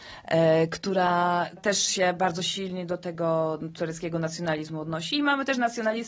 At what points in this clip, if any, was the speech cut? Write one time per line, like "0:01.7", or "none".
0:01.6